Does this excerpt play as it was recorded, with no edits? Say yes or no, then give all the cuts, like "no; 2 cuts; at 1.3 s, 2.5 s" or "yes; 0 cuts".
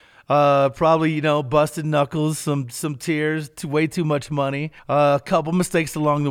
no; 1 cut; at 4.8 s